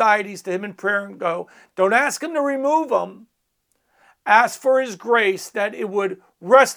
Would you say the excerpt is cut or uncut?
uncut